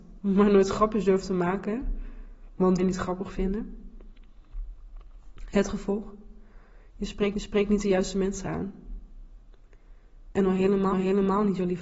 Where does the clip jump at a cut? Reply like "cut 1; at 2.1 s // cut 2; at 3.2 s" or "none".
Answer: cut 1; at 2.8 s // cut 2; at 7.3 s // cut 3; at 10.9 s

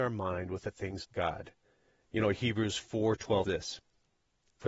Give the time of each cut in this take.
cut 1; at 1.0 s // cut 2; at 3.4 s

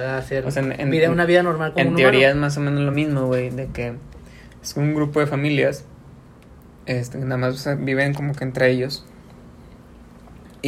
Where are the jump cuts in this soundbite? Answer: none

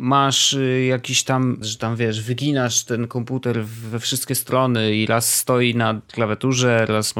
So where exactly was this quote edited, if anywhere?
cut 1; at 1.6 s

